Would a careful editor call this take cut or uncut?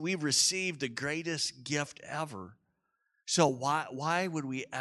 uncut